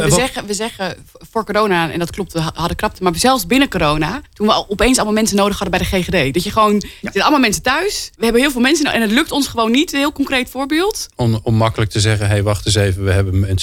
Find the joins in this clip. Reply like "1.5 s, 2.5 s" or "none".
4.2 s, 8.1 s, 11.1 s